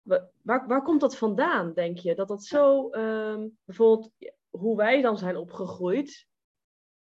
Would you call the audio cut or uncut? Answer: cut